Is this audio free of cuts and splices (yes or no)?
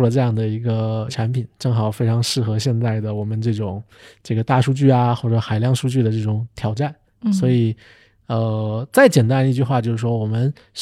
yes